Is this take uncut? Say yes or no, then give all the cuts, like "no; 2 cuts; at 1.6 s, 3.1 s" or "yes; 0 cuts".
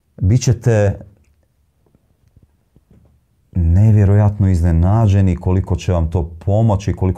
yes; 0 cuts